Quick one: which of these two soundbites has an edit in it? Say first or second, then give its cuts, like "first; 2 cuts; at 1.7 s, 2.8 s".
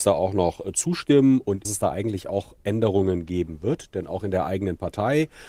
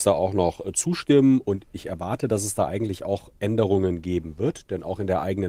first; 1 cut; at 1.6 s